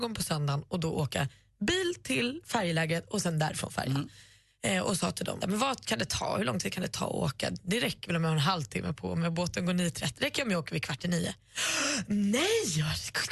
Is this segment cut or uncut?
cut